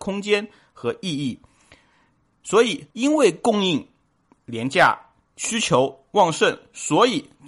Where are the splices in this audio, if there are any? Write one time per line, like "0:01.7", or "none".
0:02.9